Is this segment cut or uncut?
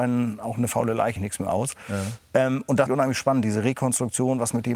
cut